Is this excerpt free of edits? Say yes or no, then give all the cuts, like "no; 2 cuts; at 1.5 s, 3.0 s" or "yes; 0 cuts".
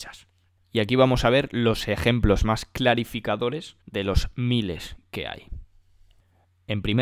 no; 1 cut; at 3.8 s